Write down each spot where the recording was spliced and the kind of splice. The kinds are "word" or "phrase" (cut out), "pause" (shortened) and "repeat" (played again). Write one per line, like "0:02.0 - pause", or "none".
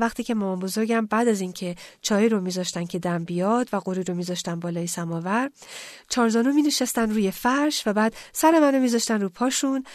none

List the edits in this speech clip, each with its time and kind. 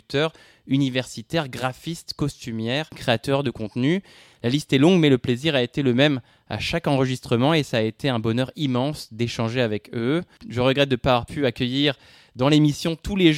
none

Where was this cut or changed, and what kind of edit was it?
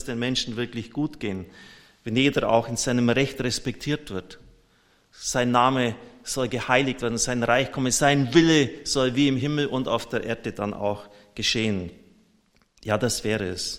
none

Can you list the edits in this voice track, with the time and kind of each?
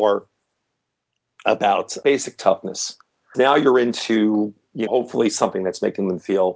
0:03.3 - word
0:04.9 - word

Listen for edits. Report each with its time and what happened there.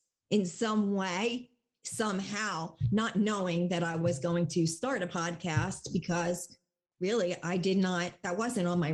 none

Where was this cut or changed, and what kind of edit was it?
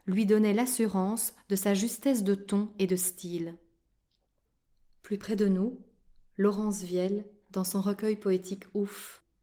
none

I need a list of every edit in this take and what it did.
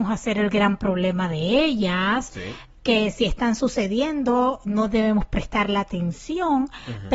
none

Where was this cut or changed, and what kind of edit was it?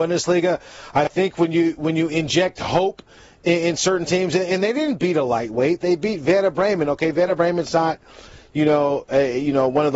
none

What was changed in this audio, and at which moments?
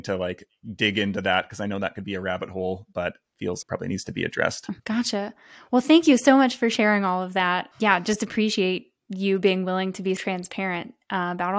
0:03.6 - phrase
0:04.8 - pause
0:09.0 - pause
0:10.2 - word

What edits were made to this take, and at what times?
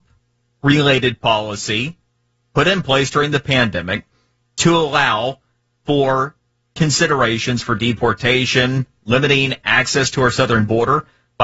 none

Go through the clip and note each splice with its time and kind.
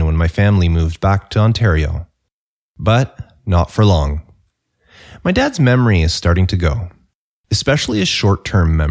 none

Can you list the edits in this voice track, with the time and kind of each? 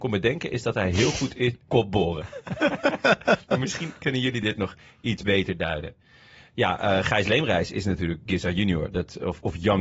0:01.7 - phrase

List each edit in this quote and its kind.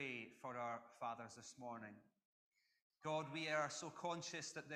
none

